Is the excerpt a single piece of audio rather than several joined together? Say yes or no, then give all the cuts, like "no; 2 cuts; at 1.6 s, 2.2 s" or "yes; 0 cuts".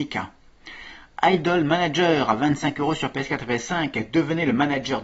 yes; 0 cuts